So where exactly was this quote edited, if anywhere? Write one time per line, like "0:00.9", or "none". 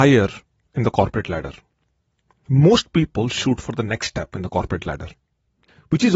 none